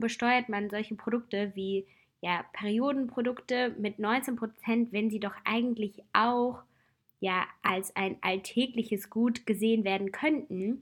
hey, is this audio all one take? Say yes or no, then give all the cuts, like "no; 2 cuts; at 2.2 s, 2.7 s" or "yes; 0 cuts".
yes; 0 cuts